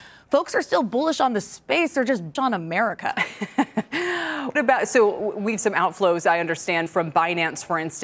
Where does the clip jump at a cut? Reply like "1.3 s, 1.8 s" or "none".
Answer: 2.4 s, 4.6 s, 5.6 s, 6.9 s